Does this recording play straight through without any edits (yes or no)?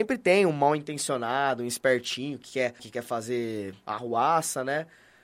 no